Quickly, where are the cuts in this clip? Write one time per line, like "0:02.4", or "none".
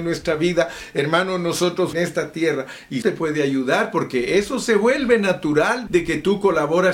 0:01.9
0:03.0
0:05.9